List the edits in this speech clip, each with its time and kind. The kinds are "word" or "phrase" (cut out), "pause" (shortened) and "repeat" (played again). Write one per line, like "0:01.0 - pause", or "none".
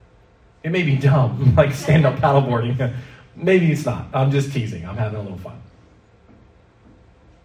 none